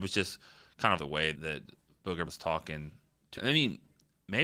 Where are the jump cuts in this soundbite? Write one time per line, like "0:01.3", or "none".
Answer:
0:01.0
0:01.3
0:02.3
0:03.4